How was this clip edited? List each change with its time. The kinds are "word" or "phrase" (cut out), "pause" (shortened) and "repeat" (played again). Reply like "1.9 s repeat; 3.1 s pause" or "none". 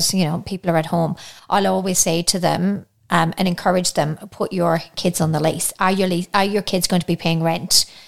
none